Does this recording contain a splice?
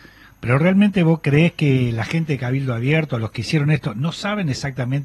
no; 0 cuts

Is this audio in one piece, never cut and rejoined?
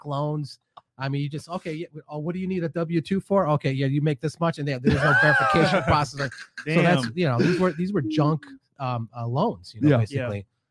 yes; 0 cuts

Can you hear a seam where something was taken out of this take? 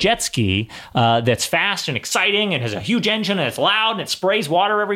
no; 0 cuts

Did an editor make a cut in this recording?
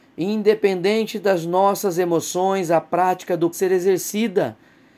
yes; 1 cut; at 3.5 s

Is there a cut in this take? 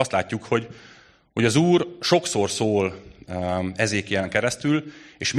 no; 0 cuts

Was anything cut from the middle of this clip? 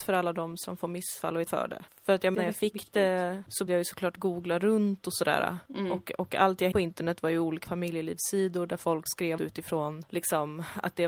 yes; 7 cuts; at 1.5 s, 2.3 s, 3.7 s, 6.7 s, 7.6 s, 9.1 s, 9.4 s

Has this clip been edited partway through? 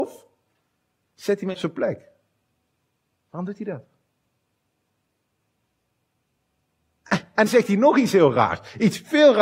yes; 2 cuts; at 1.5 s, 7.5 s

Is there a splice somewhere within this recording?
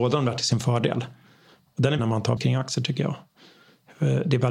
yes; 2 cuts; at 2.0 s, 2.4 s

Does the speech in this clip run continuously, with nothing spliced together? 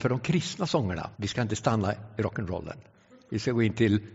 no; 1 cut; at 1.1 s

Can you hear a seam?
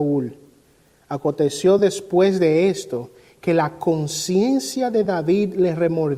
no; 0 cuts

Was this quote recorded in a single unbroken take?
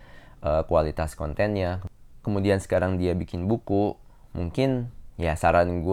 yes; 0 cuts

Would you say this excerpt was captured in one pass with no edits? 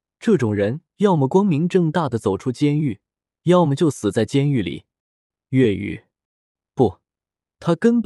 yes; 0 cuts

